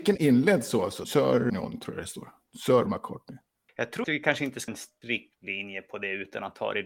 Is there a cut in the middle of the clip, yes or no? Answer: yes